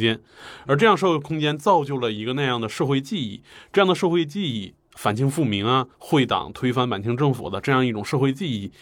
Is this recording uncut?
no; 1 cut; at 5.9 s

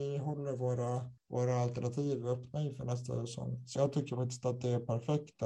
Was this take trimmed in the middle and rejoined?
yes; 2 cuts; at 1.2 s, 3.8 s

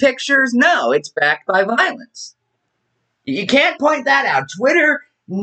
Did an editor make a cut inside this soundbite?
no; 0 cuts

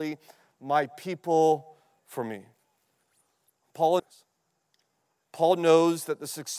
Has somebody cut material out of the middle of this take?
yes; 2 cuts; at 2.0 s, 4.0 s

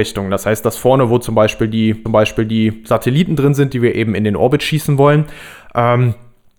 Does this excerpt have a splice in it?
yes; 1 cut; at 2.1 s

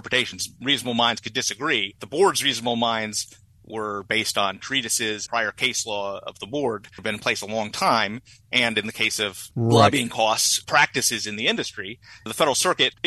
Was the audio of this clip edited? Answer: yes; 4 cuts; at 2.0 s, 5.3 s, 7.0 s, 9.5 s

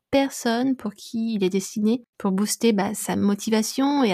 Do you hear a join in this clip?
no; 0 cuts

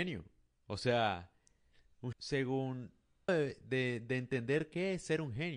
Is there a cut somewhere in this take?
yes; 2 cuts; at 2.1 s, 3.3 s

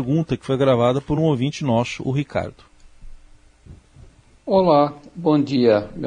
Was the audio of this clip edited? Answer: no; 0 cuts

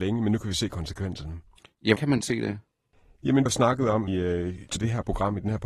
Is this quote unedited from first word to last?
no; 4 cuts; at 2.0 s, 3.5 s, 4.1 s, 4.8 s

